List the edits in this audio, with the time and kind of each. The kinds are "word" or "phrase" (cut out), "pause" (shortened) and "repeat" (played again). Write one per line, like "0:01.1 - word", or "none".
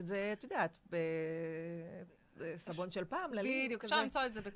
none